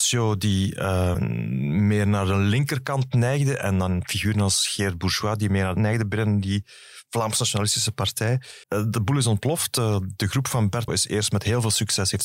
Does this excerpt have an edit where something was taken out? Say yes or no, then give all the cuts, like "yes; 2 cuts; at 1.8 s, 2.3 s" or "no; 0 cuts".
yes; 4 cuts; at 1.1 s, 5.8 s, 8.6 s, 10.9 s